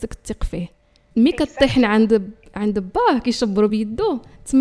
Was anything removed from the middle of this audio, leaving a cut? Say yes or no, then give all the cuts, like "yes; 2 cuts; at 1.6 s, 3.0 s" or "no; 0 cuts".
no; 0 cuts